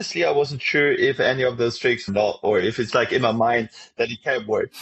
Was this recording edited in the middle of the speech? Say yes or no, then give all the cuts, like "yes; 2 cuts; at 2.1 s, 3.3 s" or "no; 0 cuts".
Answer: yes; 2 cuts; at 2.1 s, 2.9 s